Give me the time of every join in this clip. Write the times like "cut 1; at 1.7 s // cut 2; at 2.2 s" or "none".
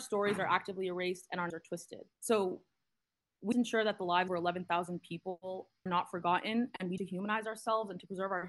cut 1; at 1.5 s // cut 2; at 2.1 s // cut 3; at 3.5 s // cut 4; at 4.3 s // cut 5; at 5.9 s // cut 6; at 7.0 s

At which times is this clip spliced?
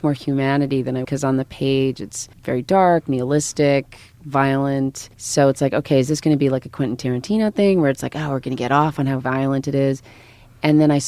cut 1; at 1.0 s // cut 2; at 2.3 s // cut 3; at 5.1 s

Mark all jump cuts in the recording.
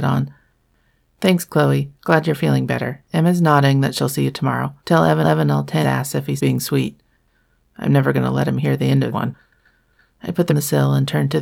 cut 1; at 1.9 s // cut 2; at 3.1 s // cut 3; at 4.8 s // cut 4; at 5.2 s // cut 5; at 5.8 s // cut 6; at 6.4 s // cut 7; at 9.1 s // cut 8; at 10.5 s

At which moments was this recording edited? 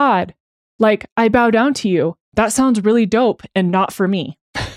none

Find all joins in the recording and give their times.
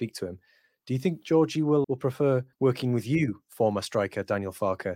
cut 1; at 1.8 s // cut 2; at 2.5 s

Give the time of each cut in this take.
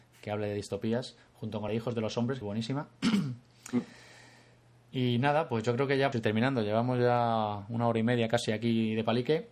cut 1; at 1.7 s // cut 2; at 2.4 s // cut 3; at 6.1 s

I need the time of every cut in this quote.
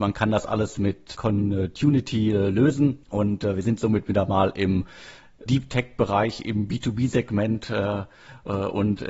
cut 1; at 1.1 s // cut 2; at 3.0 s // cut 3; at 5.5 s

